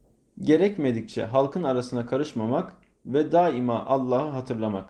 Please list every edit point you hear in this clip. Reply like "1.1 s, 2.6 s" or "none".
none